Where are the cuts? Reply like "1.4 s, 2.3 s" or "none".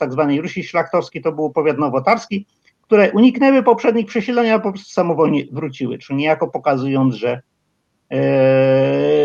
none